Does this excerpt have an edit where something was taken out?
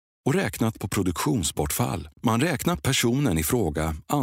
yes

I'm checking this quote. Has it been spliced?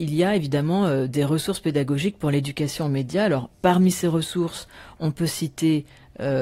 no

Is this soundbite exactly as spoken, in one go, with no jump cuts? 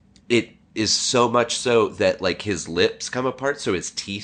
yes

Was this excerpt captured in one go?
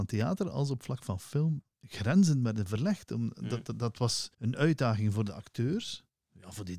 no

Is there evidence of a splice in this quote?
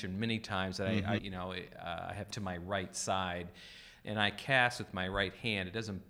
yes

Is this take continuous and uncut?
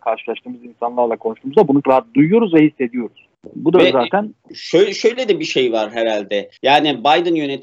no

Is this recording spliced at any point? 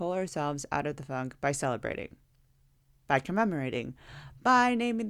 no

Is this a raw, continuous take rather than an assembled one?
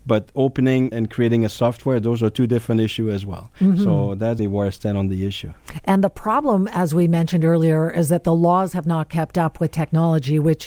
no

